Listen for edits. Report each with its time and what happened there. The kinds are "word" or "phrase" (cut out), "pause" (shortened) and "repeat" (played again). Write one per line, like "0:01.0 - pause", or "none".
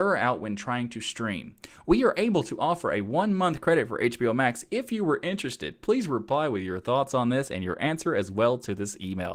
none